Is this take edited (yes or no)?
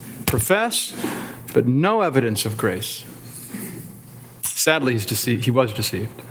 no